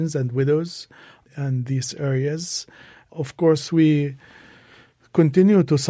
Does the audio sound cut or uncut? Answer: uncut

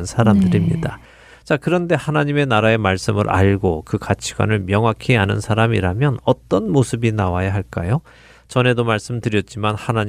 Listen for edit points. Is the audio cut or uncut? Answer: uncut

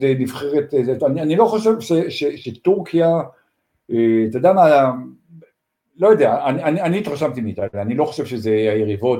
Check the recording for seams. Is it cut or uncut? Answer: uncut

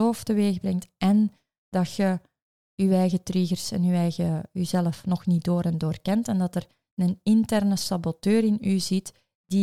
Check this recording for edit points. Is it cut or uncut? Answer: uncut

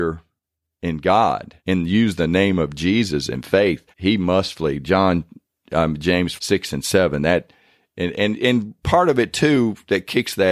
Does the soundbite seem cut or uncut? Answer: cut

